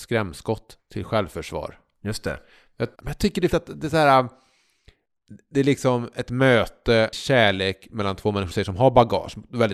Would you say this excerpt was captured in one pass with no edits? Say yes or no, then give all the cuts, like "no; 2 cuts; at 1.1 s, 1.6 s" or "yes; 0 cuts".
no; 4 cuts; at 3.0 s, 3.5 s, 7.1 s, 8.5 s